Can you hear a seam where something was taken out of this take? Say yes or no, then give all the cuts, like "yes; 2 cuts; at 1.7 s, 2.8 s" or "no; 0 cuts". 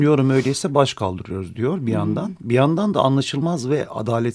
no; 0 cuts